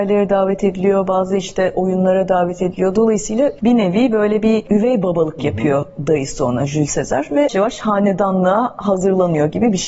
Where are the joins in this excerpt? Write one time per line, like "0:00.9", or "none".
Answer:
0:07.5